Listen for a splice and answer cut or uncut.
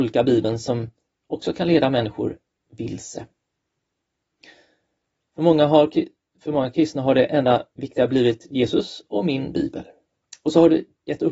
uncut